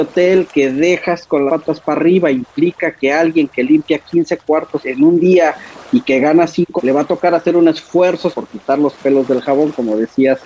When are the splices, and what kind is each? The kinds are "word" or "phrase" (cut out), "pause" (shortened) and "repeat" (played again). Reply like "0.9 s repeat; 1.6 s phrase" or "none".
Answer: 1.5 s word; 4.8 s word; 6.8 s word; 8.3 s word